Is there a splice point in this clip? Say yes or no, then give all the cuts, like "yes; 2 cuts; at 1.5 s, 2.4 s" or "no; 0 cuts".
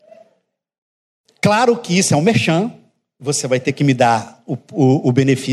no; 0 cuts